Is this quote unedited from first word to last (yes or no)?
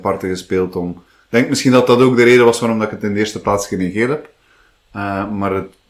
yes